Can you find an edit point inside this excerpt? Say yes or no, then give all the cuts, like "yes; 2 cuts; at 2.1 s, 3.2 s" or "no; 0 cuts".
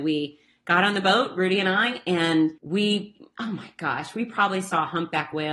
yes; 1 cut; at 2.6 s